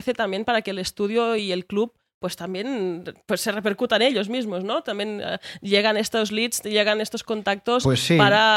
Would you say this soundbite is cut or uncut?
uncut